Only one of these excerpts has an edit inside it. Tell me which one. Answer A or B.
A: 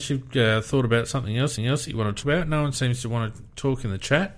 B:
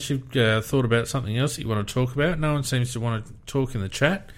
A